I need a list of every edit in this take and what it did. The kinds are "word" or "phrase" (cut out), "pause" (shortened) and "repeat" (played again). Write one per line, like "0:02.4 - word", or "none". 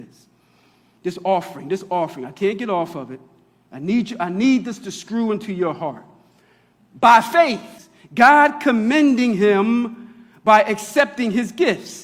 none